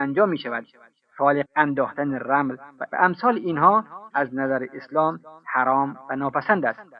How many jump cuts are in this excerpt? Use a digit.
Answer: 3